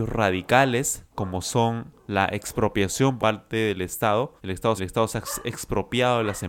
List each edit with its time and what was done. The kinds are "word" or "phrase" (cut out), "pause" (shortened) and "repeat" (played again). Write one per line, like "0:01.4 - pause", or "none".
0:01.1 - pause
0:03.2 - word
0:04.4 - pause
0:04.8 - repeat